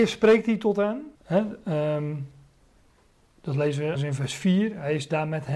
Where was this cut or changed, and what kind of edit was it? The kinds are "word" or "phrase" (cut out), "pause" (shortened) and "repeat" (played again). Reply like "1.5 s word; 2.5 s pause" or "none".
1.1 s pause; 3.9 s word